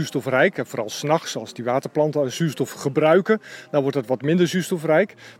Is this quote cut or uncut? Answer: uncut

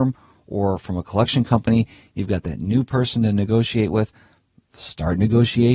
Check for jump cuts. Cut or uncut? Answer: uncut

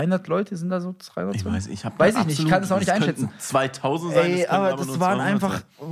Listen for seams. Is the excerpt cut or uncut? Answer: uncut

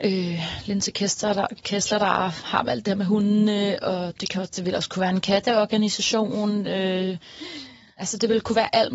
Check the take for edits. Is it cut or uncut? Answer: uncut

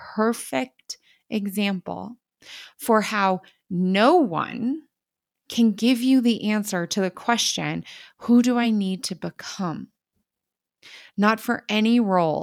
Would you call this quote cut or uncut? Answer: uncut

